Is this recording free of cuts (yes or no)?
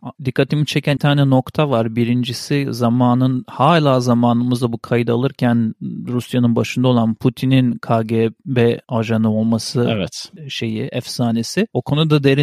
no